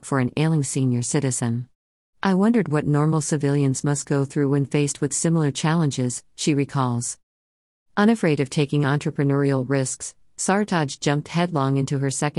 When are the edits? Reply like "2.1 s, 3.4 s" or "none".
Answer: none